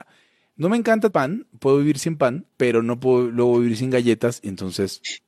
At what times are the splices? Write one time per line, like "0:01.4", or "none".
0:01.1
0:02.5